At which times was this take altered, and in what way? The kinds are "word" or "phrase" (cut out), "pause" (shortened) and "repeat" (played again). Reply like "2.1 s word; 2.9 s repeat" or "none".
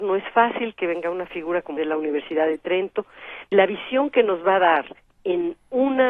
1.8 s phrase; 3.5 s word